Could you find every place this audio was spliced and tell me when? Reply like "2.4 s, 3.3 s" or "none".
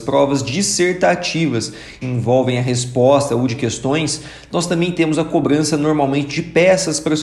2.0 s, 3.5 s